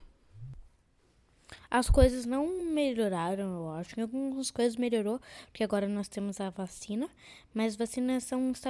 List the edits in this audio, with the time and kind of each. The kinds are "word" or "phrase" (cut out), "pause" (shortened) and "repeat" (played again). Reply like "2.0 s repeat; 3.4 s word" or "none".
none